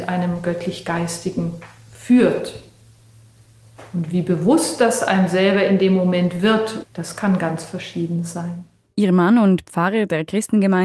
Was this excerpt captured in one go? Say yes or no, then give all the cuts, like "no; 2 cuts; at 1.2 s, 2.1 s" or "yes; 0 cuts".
yes; 0 cuts